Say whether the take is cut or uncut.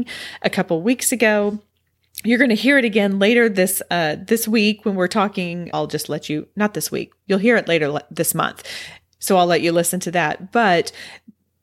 cut